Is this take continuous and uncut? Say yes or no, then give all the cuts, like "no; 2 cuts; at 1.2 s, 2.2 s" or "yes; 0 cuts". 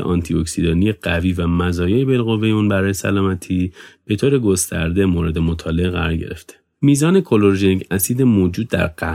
yes; 0 cuts